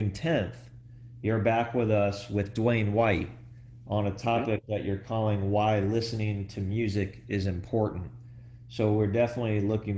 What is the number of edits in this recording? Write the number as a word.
zero